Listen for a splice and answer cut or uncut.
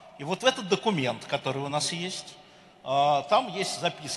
uncut